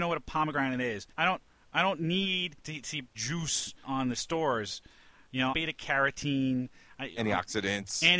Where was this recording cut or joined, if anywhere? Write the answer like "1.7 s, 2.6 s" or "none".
1.1 s, 2.6 s, 3.1 s, 3.8 s, 4.2 s, 5.5 s